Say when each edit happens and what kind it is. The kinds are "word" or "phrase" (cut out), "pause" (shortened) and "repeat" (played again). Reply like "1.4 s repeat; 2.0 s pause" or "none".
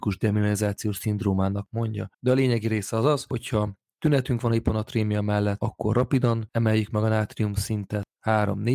2.1 s pause